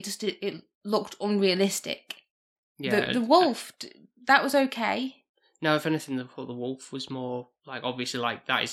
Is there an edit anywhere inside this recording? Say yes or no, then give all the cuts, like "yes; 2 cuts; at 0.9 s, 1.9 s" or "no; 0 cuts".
no; 0 cuts